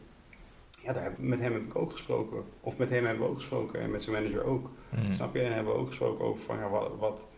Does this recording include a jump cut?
yes; 1 cut; at 1.2 s

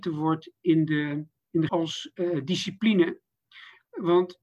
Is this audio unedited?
no; 2 cuts; at 1.4 s, 1.7 s

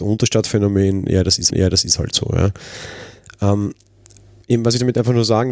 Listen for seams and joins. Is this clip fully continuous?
no; 1 cut; at 1.5 s

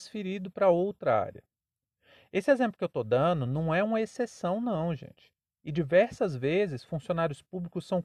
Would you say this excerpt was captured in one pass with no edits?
yes; 0 cuts

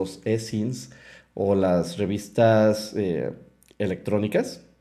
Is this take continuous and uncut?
yes; 0 cuts

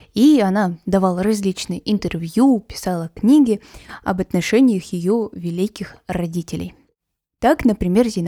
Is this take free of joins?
yes; 0 cuts

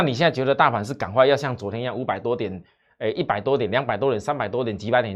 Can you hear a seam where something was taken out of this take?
no; 0 cuts

